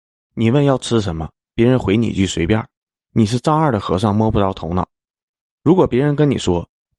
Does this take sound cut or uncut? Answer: uncut